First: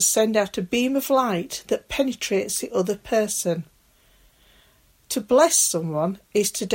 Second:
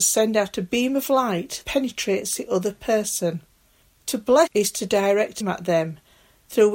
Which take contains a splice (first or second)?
second